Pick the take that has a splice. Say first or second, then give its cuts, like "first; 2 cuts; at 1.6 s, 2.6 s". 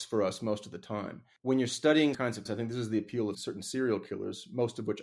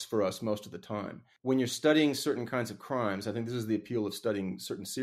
first; 3 cuts; at 2.1 s, 2.5 s, 3.3 s